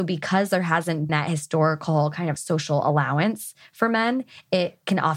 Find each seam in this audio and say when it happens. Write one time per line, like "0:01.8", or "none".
0:01.1
0:02.4